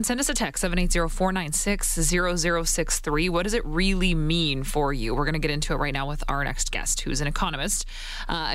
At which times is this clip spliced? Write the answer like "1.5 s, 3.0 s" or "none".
none

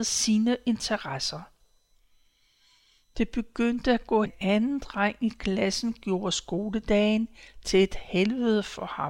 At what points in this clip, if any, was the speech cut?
4.3 s

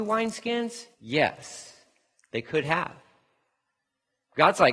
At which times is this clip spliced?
0.9 s

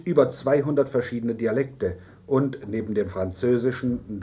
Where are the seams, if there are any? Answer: none

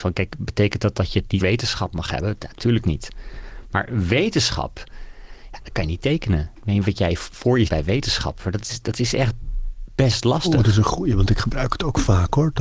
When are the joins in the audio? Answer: 1.4 s, 7.7 s

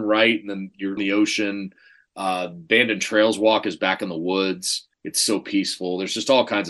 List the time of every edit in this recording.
1.0 s, 4.9 s

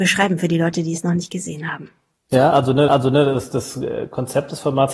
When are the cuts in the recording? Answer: 2.9 s

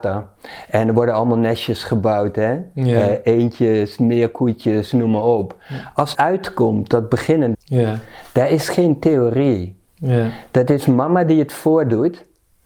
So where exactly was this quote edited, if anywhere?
6.1 s, 7.5 s, 9.9 s

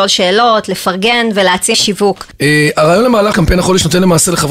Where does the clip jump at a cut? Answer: 1.7 s, 3.3 s

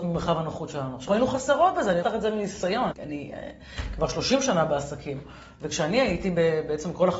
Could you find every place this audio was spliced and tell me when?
1.1 s, 2.0 s, 2.9 s

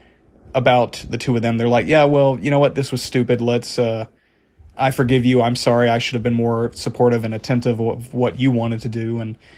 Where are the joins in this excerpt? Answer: none

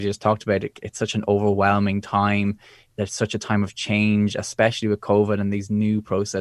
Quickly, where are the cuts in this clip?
none

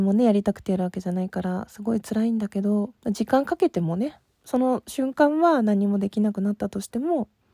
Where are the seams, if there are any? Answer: 3.0 s

